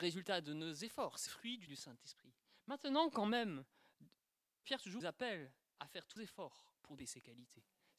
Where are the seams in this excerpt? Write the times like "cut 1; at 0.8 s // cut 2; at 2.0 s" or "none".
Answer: cut 1; at 1.3 s // cut 2; at 1.7 s // cut 3; at 4.6 s // cut 4; at 5.0 s // cut 5; at 6.2 s // cut 6; at 7.0 s